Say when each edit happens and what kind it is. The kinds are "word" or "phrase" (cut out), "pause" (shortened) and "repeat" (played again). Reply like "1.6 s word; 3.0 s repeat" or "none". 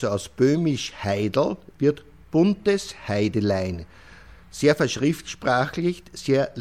none